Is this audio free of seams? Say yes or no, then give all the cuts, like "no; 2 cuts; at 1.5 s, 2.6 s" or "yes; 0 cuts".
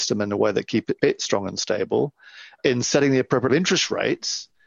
no; 3 cuts; at 1.0 s, 2.6 s, 3.5 s